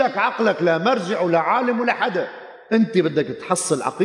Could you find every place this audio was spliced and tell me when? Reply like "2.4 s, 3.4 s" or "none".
none